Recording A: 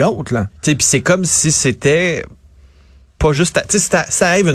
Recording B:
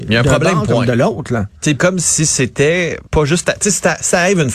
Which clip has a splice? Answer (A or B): B